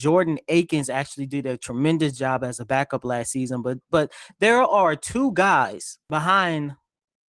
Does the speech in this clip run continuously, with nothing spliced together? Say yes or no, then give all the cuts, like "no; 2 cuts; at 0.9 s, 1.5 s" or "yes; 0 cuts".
no; 1 cut; at 6.0 s